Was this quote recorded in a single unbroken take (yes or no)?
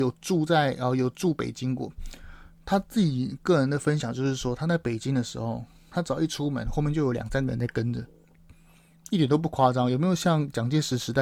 yes